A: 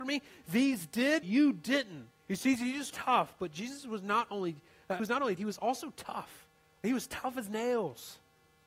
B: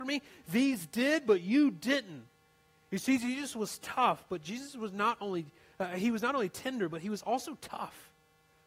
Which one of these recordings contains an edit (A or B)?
A